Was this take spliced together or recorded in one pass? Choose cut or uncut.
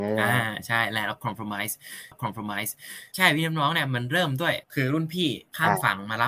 cut